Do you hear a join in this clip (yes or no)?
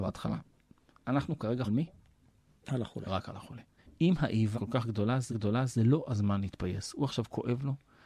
yes